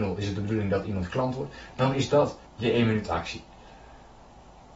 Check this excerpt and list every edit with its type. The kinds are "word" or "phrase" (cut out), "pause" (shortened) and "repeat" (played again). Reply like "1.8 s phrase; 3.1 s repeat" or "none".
2.5 s pause